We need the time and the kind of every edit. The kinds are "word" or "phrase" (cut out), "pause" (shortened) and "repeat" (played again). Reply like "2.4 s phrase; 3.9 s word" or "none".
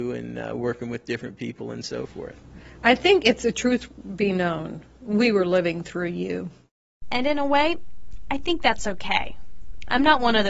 none